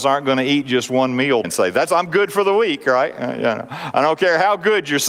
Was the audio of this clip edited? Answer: yes; 1 cut; at 1.4 s

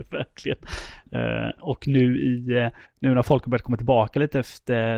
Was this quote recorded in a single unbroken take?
no; 1 cut; at 2.8 s

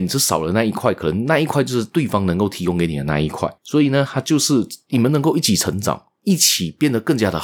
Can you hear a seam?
yes; 1 cut; at 3.6 s

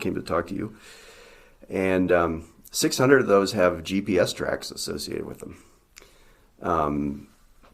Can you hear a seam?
no; 0 cuts

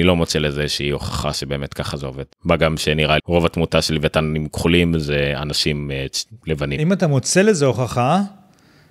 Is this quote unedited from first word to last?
no; 2 cuts; at 2.3 s, 3.2 s

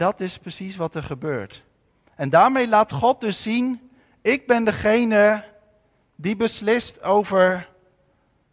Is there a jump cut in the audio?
no; 0 cuts

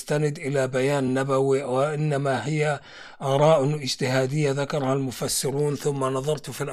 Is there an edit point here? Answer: no; 0 cuts

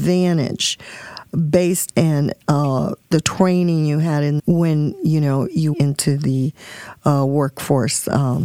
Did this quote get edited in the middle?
yes; 3 cuts; at 1.9 s, 4.4 s, 5.7 s

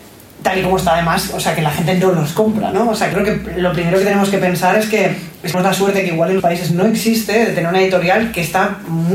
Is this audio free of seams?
no; 3 cuts; at 3.1 s, 5.5 s, 6.4 s

